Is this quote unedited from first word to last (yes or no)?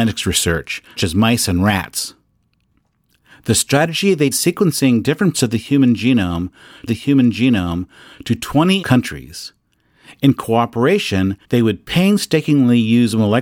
no